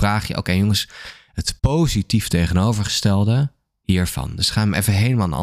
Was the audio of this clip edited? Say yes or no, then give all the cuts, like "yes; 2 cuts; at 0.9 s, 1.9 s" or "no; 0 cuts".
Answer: yes; 1 cut; at 1.6 s